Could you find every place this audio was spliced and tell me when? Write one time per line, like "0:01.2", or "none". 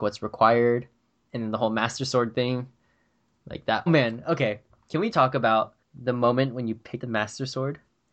0:03.9
0:05.1
0:05.8
0:07.0